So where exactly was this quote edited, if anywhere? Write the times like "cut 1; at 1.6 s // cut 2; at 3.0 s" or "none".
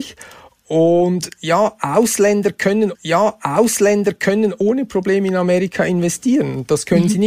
cut 1; at 2.9 s